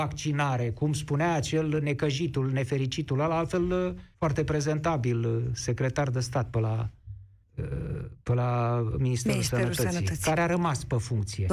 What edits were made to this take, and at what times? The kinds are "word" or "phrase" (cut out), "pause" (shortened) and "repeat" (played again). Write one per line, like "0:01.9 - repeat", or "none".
0:04.1 - pause
0:07.4 - pause